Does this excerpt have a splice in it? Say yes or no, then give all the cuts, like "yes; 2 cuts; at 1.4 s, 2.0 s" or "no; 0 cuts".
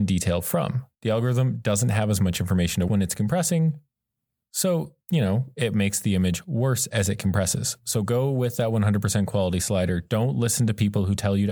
yes; 3 cuts; at 0.9 s, 2.9 s, 5.0 s